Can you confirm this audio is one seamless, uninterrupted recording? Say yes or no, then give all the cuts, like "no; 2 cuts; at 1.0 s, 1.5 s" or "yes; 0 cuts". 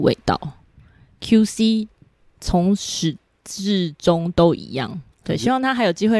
no; 1 cut; at 5.1 s